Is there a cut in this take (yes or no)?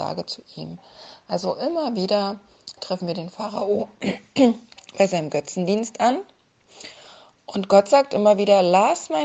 no